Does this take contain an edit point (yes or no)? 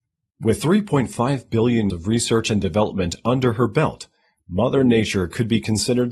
yes